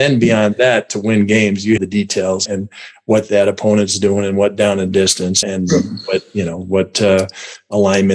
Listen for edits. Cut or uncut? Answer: cut